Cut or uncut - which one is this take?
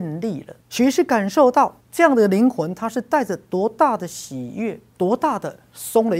cut